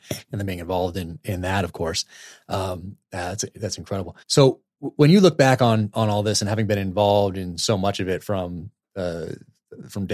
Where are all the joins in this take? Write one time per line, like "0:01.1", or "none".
0:04.2